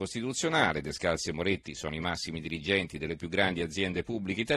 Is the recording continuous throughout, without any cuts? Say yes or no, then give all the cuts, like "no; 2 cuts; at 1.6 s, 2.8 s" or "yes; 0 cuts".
no; 1 cut; at 3.2 s